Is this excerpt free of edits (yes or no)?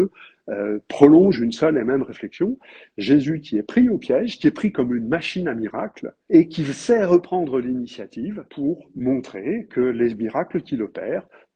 no